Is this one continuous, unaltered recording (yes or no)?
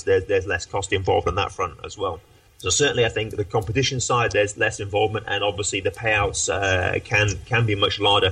yes